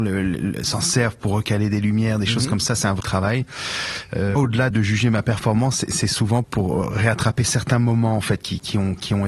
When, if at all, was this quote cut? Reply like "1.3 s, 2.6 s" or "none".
3.0 s, 4.4 s, 4.7 s, 6.4 s